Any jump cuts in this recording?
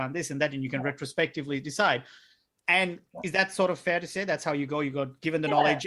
no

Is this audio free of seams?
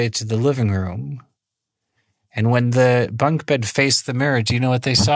yes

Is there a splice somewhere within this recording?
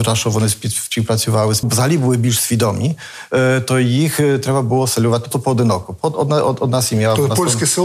yes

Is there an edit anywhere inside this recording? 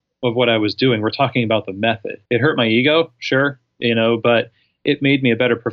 yes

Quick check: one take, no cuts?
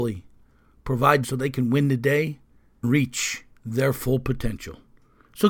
no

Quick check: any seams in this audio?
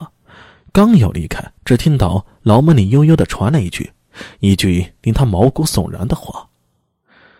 yes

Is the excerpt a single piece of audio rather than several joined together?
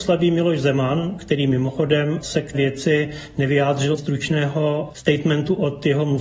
no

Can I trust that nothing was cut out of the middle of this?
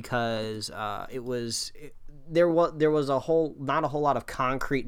yes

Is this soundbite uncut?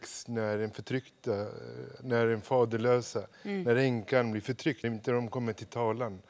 no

